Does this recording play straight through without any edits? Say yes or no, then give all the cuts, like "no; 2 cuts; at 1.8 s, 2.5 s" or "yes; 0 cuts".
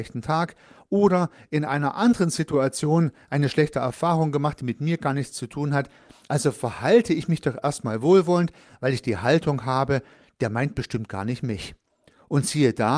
yes; 0 cuts